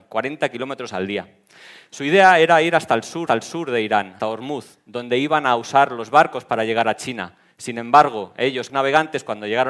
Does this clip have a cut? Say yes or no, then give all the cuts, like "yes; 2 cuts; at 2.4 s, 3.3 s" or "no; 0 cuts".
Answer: yes; 3 cuts; at 3.3 s, 4.2 s, 8.7 s